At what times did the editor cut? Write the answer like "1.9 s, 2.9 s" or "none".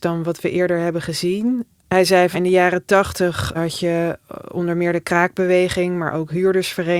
2.3 s, 3.5 s